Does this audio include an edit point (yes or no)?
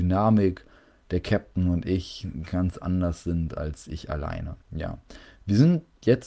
yes